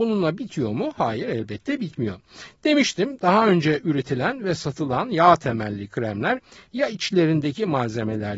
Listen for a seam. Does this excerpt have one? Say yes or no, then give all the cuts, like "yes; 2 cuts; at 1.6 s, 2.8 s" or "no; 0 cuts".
no; 0 cuts